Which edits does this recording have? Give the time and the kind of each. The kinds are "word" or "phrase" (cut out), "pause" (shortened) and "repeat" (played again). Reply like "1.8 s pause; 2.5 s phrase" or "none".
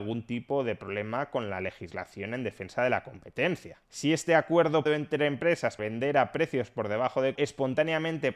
3.8 s pause; 4.9 s word; 5.8 s word; 7.4 s phrase